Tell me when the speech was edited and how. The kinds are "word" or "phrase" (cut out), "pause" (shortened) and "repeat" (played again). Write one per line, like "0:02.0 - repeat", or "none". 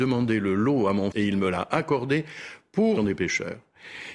0:01.1 - word
0:03.0 - phrase